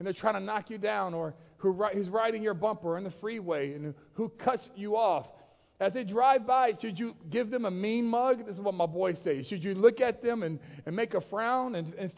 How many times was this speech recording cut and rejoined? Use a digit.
0